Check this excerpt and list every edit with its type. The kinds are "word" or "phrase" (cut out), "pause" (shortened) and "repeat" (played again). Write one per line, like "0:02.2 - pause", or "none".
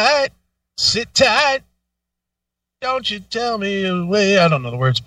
none